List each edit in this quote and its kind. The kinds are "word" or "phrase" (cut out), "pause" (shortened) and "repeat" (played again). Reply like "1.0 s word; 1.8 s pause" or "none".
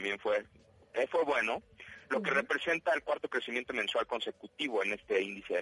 none